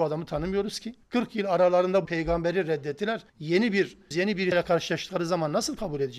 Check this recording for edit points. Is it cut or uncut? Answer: cut